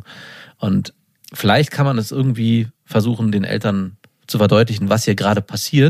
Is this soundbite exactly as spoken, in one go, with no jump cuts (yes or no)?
no